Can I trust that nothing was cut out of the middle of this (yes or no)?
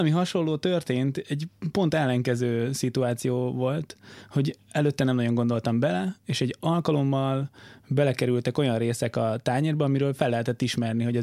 yes